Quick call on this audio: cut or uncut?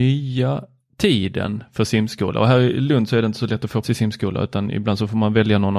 cut